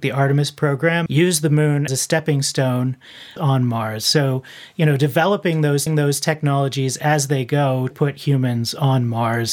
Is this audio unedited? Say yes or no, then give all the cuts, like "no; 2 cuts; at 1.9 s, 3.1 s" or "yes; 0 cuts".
no; 5 cuts; at 1.1 s, 1.9 s, 3.4 s, 5.9 s, 7.9 s